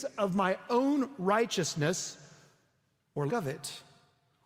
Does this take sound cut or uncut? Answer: cut